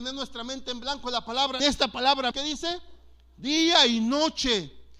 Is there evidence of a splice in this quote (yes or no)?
yes